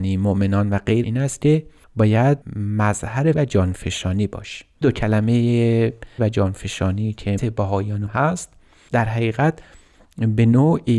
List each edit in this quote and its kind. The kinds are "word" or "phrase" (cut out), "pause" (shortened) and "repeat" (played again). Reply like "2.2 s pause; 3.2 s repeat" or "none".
1.0 s word; 3.3 s word; 4.8 s word; 6.2 s word; 7.4 s word; 8.1 s word